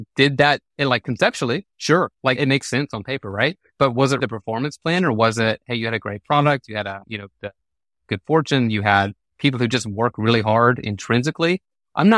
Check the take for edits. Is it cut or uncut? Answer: cut